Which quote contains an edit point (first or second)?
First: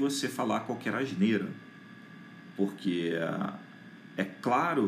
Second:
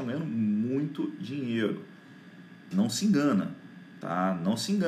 second